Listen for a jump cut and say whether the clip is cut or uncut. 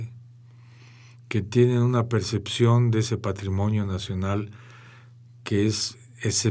uncut